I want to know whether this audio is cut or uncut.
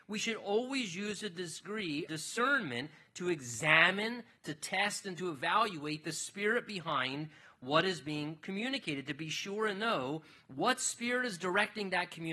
cut